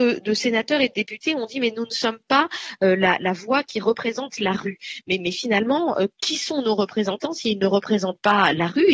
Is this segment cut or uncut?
uncut